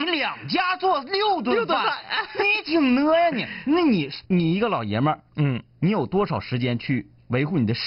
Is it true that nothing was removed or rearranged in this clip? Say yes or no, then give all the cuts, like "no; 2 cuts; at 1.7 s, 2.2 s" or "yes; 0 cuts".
no; 1 cut; at 4.3 s